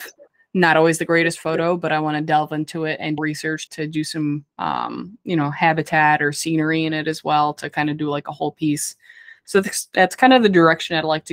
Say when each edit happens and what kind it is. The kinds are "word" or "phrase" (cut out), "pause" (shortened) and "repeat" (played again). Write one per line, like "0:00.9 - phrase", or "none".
0:03.2 - phrase
0:03.7 - word
0:04.5 - pause